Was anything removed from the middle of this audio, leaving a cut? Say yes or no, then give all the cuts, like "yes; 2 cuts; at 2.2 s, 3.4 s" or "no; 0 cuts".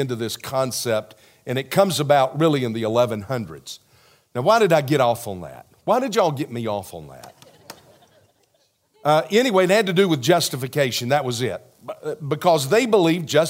no; 0 cuts